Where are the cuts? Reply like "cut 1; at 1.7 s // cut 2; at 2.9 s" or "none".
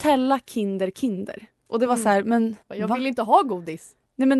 cut 1; at 2.6 s